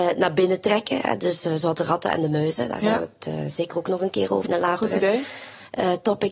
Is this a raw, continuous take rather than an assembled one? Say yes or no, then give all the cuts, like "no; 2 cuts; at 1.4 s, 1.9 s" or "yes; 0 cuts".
no; 1 cut; at 4.4 s